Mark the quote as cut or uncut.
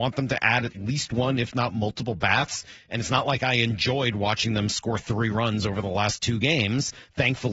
uncut